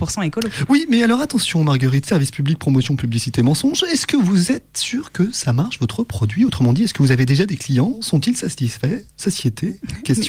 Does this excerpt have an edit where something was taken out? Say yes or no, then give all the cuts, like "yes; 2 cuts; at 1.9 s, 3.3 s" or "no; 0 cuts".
yes; 1 cut; at 9.1 s